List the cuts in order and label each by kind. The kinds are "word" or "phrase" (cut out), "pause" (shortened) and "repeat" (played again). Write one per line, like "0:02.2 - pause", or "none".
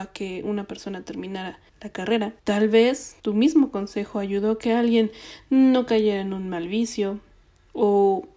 0:01.7 - pause
0:02.4 - pause
0:03.2 - pause